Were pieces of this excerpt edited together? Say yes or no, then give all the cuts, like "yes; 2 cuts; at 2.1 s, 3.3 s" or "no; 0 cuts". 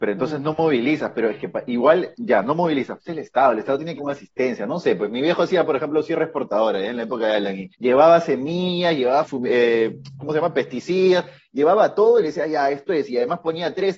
yes; 4 cuts; at 3.0 s, 4.0 s, 7.7 s, 9.2 s